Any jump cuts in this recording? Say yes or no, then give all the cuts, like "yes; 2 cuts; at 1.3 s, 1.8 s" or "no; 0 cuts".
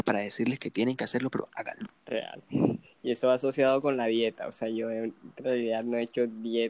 yes; 1 cut; at 2.0 s